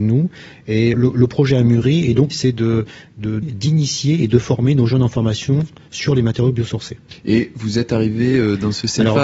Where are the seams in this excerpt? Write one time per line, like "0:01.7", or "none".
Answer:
0:00.9
0:02.3
0:03.4

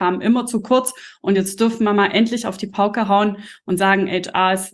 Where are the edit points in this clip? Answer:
none

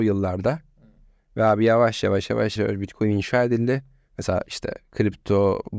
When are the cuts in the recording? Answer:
0:02.6

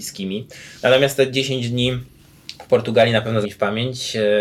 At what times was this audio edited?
0:03.4

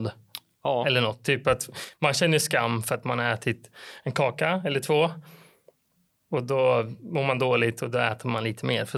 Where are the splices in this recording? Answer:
none

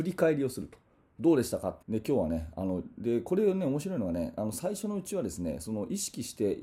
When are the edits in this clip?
0:01.8

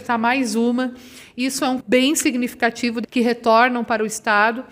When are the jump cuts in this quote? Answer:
0:01.8
0:03.0

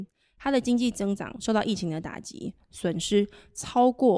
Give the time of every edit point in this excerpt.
none

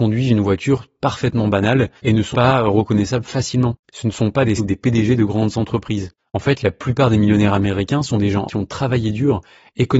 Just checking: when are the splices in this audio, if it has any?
0:02.0
0:02.3
0:03.8
0:04.6
0:06.2
0:08.5

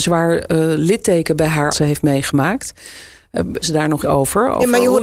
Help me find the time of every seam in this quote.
0:01.7
0:03.6
0:04.0

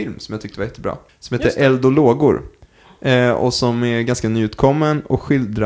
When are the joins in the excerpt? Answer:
0:01.1

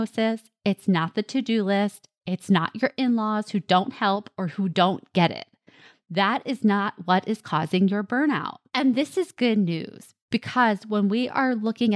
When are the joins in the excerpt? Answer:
0:08.7

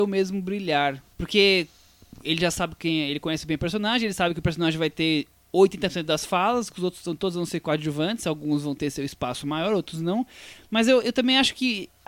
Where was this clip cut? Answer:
0:01.1

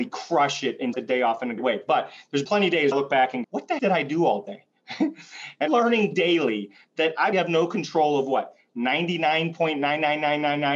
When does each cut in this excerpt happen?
0:00.9
0:01.6
0:02.4
0:02.9
0:03.4
0:03.8
0:05.7
0:07.3

